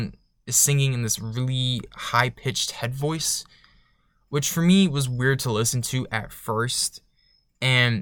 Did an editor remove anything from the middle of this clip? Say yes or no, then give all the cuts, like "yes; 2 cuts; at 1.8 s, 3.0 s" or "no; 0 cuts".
no; 0 cuts